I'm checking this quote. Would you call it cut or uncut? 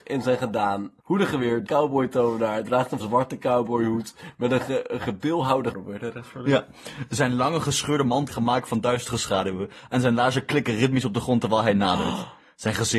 cut